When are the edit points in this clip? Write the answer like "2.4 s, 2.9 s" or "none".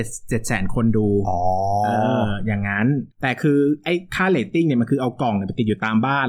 3.1 s